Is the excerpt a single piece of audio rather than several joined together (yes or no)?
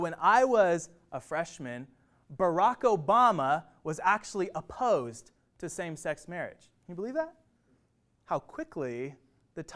yes